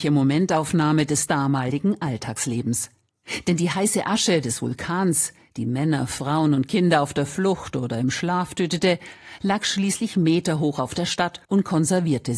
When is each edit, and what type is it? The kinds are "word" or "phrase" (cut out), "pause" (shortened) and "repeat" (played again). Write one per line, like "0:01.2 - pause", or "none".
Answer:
0:11.4 - pause